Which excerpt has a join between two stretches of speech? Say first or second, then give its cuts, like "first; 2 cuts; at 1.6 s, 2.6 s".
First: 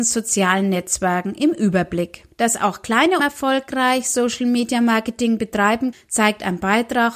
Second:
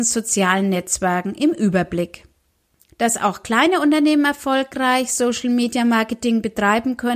first; 3 cuts; at 2.3 s, 3.2 s, 5.9 s